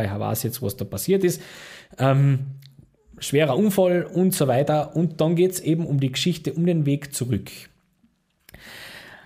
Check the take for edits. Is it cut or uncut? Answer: uncut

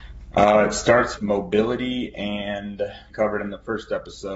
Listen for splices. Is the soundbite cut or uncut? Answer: cut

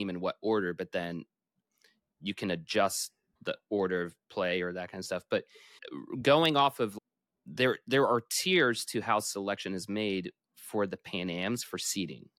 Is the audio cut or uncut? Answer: uncut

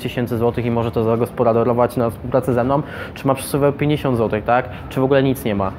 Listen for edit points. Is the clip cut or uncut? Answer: uncut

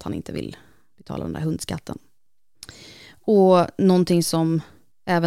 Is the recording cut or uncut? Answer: uncut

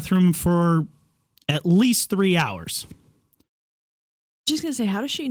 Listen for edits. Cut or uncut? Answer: uncut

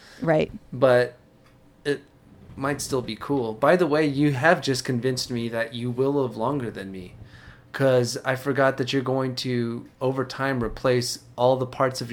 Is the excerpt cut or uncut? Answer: uncut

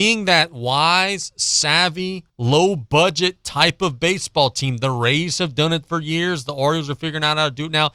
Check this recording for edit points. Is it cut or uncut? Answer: cut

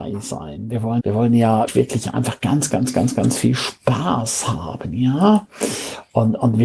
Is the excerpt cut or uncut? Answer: cut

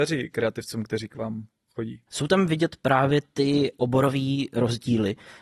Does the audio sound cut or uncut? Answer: cut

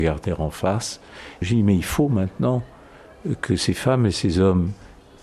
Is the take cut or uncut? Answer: cut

